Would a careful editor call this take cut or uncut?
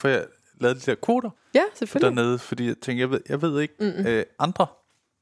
cut